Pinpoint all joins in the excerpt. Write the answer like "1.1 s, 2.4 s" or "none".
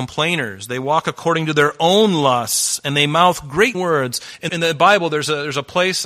3.7 s, 4.5 s